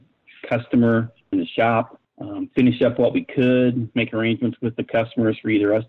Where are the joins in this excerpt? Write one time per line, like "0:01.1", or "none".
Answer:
0:01.3
0:02.0